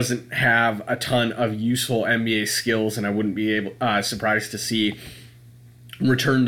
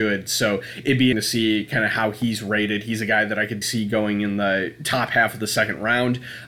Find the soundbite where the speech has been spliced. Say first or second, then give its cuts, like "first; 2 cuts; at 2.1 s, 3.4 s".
second; 2 cuts; at 1.1 s, 3.6 s